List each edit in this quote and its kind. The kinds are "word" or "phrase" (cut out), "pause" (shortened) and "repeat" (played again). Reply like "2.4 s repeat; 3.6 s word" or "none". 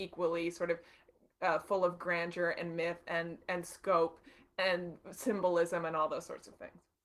none

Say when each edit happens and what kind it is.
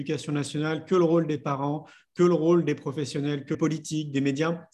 3.5 s phrase

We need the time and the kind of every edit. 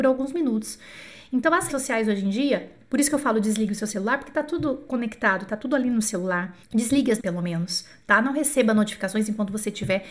1.7 s word; 6.6 s pause; 7.2 s word

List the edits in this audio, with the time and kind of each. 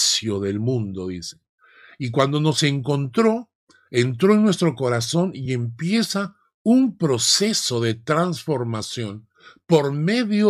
none

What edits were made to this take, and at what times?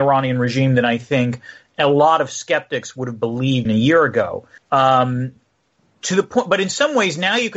3.7 s word; 4.6 s pause

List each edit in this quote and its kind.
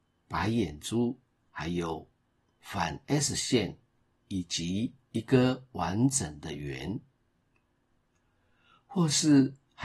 none

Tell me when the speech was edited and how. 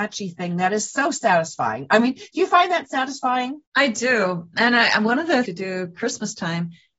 3.7 s pause; 5.5 s phrase

